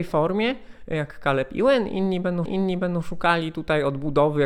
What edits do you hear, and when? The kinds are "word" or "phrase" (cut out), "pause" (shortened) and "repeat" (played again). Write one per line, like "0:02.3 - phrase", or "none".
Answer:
0:02.5 - repeat